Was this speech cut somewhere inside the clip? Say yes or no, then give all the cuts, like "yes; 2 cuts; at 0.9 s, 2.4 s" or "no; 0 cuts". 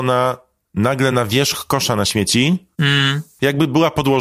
no; 0 cuts